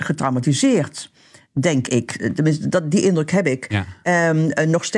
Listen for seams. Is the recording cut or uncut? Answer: uncut